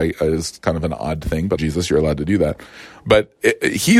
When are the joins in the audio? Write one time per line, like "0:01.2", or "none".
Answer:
0:01.6